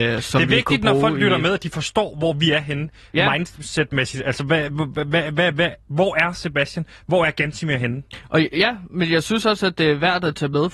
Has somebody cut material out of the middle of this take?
no; 0 cuts

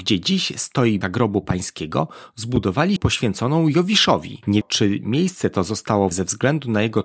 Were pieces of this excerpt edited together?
yes; 4 cuts; at 1.0 s, 3.0 s, 4.6 s, 6.1 s

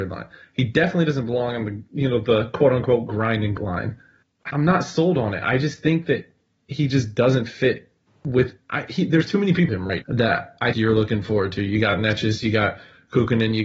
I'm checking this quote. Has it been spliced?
yes; 6 cuts; at 3.6 s, 4.5 s, 8.0 s, 9.7 s, 10.0 s, 10.7 s

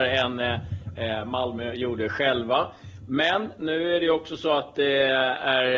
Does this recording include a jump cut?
no; 0 cuts

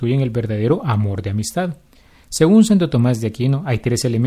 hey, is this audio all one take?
yes; 0 cuts

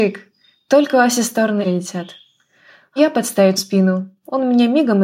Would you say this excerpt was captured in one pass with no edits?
no; 3 cuts; at 1.6 s, 3.0 s, 3.6 s

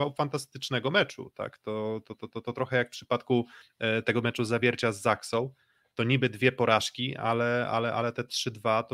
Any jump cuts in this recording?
no; 0 cuts

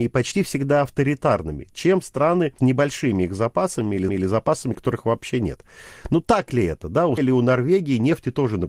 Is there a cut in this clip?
yes; 3 cuts; at 2.6 s, 4.1 s, 7.2 s

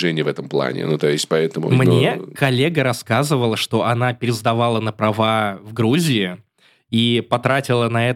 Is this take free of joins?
yes; 0 cuts

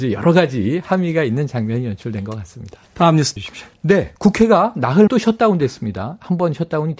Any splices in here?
yes; 3 cuts; at 2.9 s, 3.4 s, 5.1 s

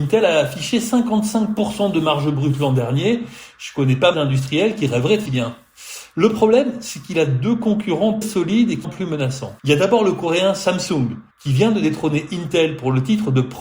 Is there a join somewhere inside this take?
yes; 6 cuts; at 4.1 s, 5.3 s, 8.2 s, 8.8 s, 9.6 s, 11.3 s

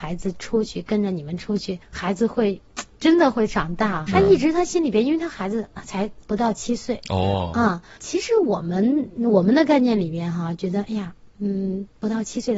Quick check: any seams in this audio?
yes; 3 cuts; at 1.8 s, 4.1 s, 8.0 s

